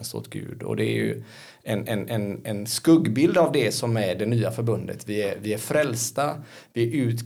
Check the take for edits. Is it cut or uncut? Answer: uncut